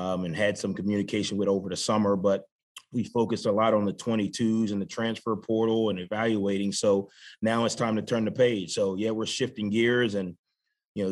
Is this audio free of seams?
yes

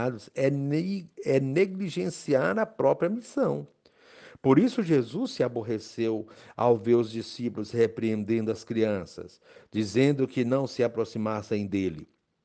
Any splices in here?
no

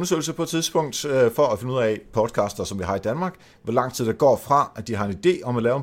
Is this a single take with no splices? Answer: yes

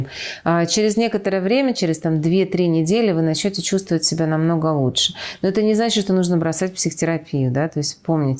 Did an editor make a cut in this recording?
no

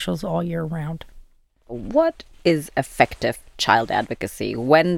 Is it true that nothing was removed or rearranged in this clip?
yes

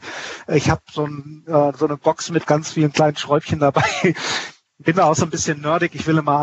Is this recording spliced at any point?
no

